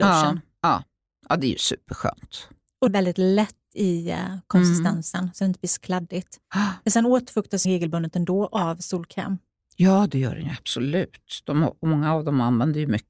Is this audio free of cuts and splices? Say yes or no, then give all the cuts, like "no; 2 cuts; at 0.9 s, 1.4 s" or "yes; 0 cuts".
no; 2 cuts; at 2.9 s, 7.6 s